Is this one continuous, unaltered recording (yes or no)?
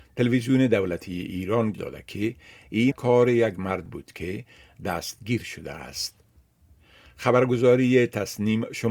no